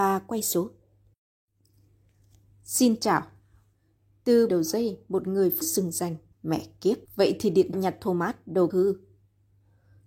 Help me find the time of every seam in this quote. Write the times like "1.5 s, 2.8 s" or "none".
4.5 s, 5.6 s, 6.3 s, 7.1 s, 7.7 s, 8.7 s

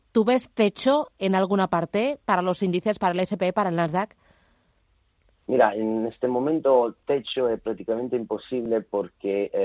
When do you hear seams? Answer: none

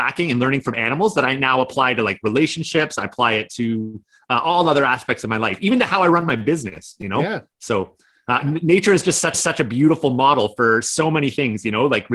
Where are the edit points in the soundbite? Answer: 9.3 s

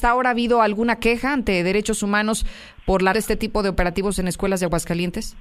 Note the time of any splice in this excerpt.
3.1 s

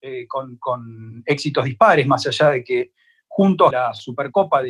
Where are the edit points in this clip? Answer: 3.7 s

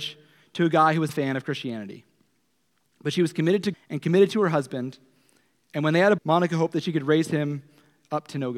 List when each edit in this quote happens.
1.1 s, 3.7 s, 6.2 s

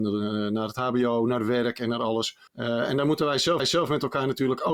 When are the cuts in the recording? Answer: 2.5 s, 3.6 s

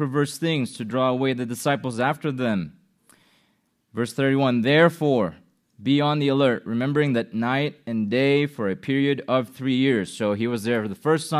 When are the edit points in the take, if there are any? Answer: none

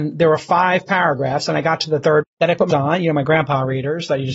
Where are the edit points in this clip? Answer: 2.2 s, 2.7 s

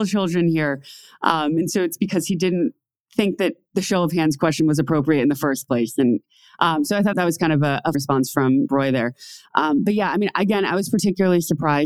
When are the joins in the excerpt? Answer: 7.1 s, 7.9 s, 8.7 s

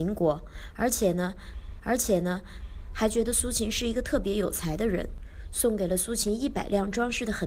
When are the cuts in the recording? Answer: 1.8 s

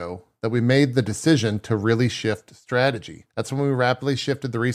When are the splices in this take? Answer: 3.3 s

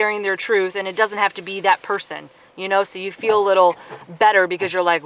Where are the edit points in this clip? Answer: none

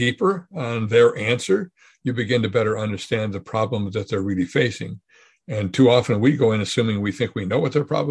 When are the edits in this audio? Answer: none

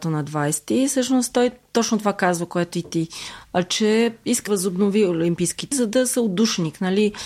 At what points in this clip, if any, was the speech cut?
3.4 s, 4.5 s, 5.7 s

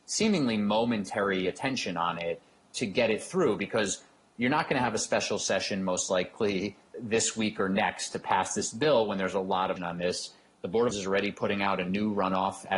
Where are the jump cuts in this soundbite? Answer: 2.6 s, 6.9 s, 9.8 s, 10.9 s

